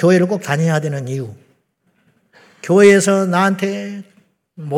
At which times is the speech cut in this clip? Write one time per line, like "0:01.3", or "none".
none